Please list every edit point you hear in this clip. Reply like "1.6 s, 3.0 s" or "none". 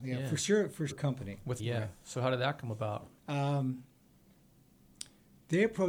0.9 s, 1.6 s, 3.2 s